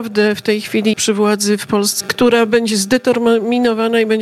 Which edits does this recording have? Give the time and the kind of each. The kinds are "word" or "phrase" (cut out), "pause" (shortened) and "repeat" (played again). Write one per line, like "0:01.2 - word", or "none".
0:00.9 - word
0:02.0 - word